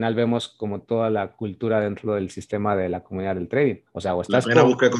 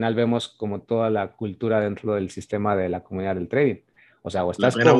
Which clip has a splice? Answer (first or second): first